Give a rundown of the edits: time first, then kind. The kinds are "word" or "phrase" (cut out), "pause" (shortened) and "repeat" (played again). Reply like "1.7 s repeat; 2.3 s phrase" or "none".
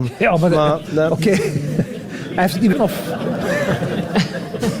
2.7 s word

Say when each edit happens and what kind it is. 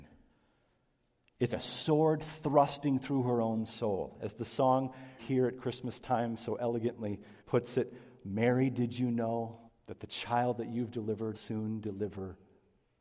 1.5 s word; 5.2 s word; 7.4 s pause; 9.7 s pause; 11.3 s word

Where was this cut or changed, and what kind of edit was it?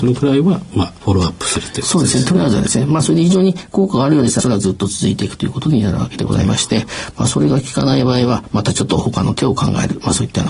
4.4 s phrase

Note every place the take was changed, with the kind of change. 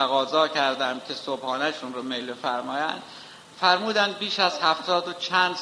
none

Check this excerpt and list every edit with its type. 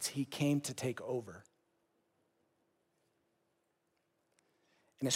none

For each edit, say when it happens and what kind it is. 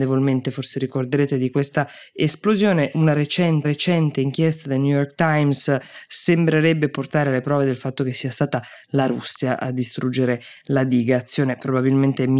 3.6 s repeat

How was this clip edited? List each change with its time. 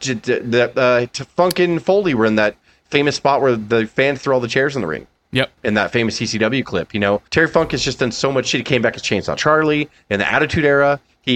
5.6 s pause; 7.3 s pause

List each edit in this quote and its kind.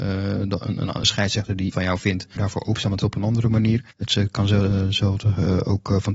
1.0 s phrase; 1.7 s word; 2.4 s word; 3.0 s phrase; 3.9 s pause

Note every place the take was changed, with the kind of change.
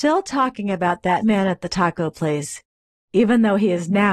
1.2 s word

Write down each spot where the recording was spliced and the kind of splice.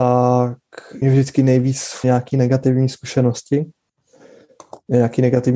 1.0 s word; 2.0 s word

